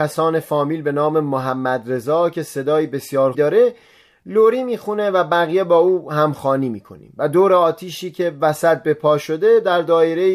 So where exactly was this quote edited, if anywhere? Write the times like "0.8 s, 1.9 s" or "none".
3.3 s